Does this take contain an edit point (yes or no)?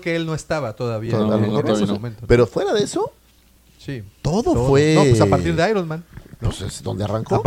no